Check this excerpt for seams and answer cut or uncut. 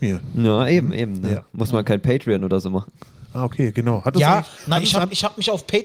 uncut